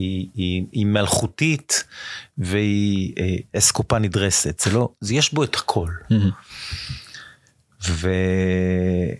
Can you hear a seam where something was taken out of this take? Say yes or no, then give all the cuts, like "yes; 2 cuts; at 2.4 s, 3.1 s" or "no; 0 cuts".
no; 0 cuts